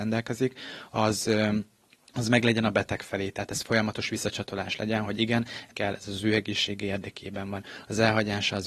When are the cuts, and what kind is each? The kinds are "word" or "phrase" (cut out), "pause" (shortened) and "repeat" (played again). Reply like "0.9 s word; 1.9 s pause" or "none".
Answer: 5.7 s word